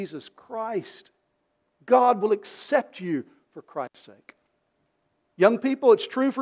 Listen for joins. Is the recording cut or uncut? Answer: uncut